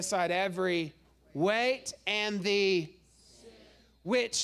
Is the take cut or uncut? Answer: uncut